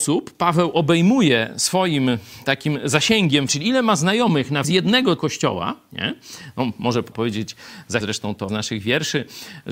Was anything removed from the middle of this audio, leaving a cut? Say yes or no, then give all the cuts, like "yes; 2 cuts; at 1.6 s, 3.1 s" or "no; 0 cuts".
yes; 6 cuts; at 3.5 s, 4.6 s, 5.2 s, 7.1 s, 8.0 s, 8.5 s